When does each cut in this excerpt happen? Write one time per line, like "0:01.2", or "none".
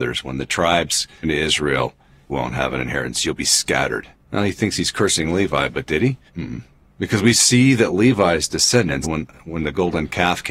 0:01.2
0:02.3
0:04.1
0:06.3
0:09.0